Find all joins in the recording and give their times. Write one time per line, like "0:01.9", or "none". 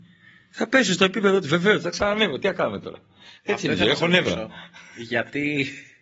0:03.4